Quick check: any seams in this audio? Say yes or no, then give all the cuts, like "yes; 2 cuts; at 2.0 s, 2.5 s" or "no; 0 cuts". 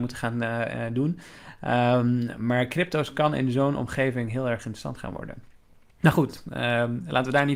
no; 0 cuts